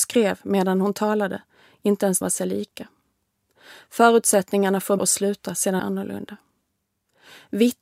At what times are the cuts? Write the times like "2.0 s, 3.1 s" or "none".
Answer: 2.2 s, 5.0 s, 5.8 s

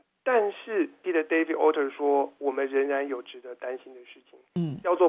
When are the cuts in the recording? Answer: 1.0 s

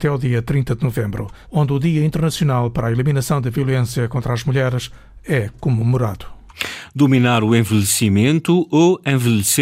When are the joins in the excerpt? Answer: 1.4 s

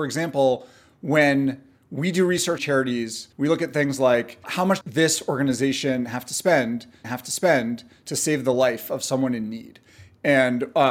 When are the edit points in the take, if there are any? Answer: 2.6 s, 3.3 s, 4.4 s, 4.8 s, 7.0 s

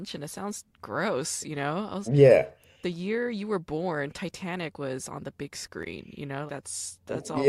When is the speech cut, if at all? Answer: 2.1 s, 6.5 s

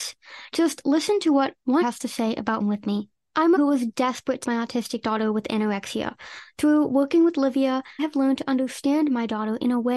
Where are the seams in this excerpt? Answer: 1.8 s, 2.6 s, 3.6 s, 4.4 s, 8.0 s

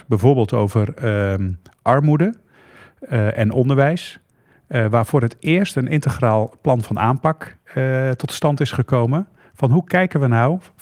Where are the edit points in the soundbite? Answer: none

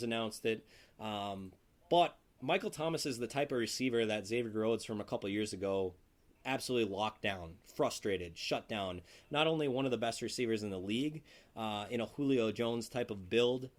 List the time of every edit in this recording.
none

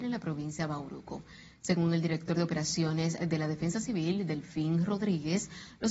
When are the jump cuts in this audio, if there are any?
none

